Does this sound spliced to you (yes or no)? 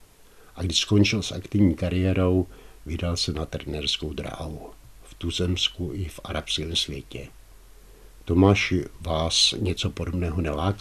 no